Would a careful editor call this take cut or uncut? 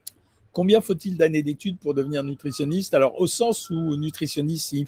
uncut